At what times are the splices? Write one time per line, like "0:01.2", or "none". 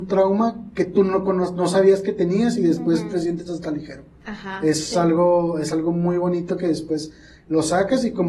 none